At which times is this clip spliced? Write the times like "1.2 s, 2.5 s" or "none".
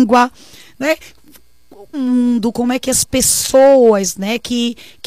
1.9 s